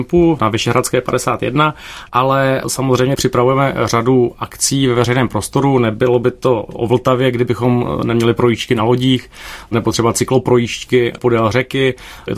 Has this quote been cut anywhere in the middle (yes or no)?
no